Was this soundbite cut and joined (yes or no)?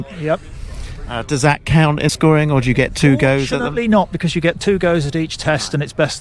yes